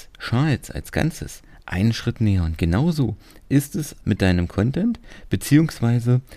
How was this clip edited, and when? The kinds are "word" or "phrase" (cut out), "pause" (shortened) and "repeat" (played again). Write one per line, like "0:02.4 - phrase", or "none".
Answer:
0:04.0 - word